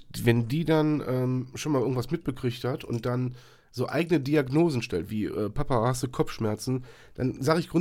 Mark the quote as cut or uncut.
uncut